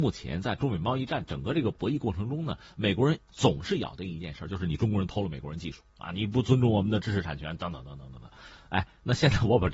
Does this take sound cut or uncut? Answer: cut